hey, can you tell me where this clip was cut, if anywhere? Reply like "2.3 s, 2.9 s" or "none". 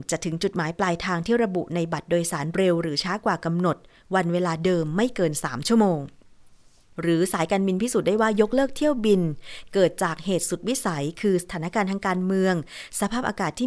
none